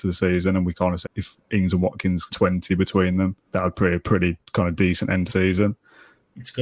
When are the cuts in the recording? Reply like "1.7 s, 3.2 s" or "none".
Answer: 1.0 s, 2.3 s, 3.4 s, 4.0 s, 5.3 s